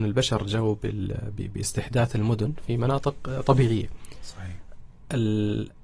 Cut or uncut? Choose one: uncut